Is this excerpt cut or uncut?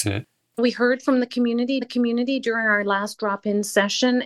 cut